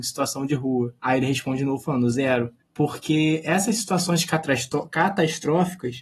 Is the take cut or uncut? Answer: cut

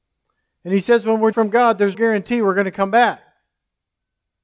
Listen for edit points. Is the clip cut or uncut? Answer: cut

